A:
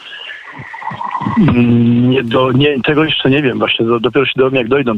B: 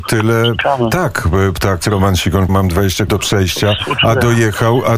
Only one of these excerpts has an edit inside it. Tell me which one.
B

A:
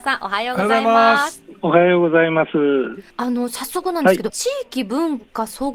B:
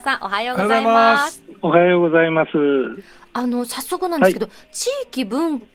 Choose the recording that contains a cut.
A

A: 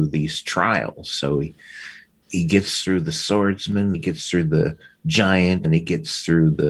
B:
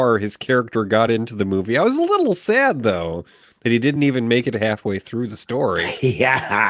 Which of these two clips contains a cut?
A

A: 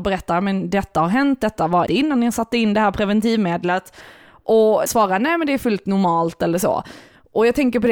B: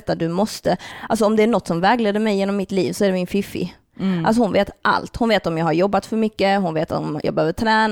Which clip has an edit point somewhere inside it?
A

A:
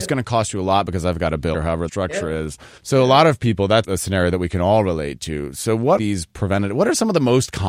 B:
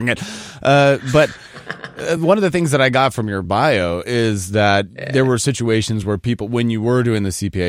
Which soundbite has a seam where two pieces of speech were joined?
A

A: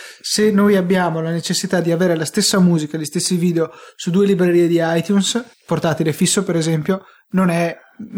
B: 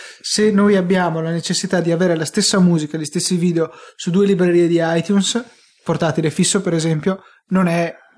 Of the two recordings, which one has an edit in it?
A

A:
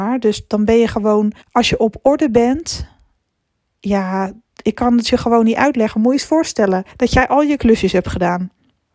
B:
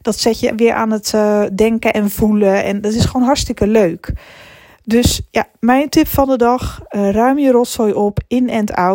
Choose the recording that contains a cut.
A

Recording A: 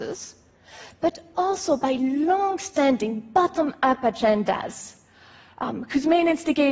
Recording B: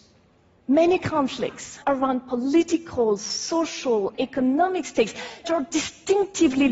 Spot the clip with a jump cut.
B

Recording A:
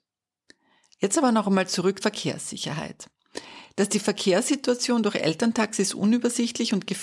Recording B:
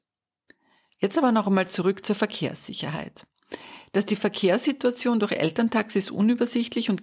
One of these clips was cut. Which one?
A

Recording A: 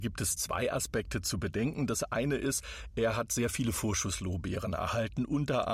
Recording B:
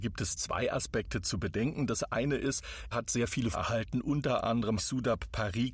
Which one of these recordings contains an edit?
B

